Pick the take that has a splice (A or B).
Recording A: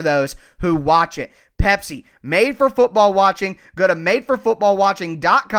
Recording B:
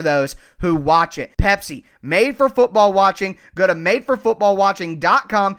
B